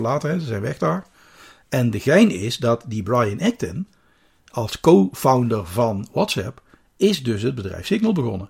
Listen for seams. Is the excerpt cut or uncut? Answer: uncut